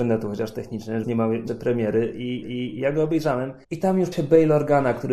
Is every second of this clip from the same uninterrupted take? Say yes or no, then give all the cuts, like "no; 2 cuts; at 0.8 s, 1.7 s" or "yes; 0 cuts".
no; 5 cuts; at 1.0 s, 1.5 s, 2.4 s, 3.6 s, 4.1 s